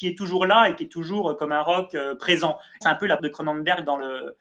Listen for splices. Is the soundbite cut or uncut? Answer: cut